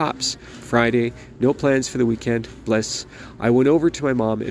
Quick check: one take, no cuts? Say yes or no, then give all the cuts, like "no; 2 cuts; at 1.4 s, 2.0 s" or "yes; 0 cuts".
yes; 0 cuts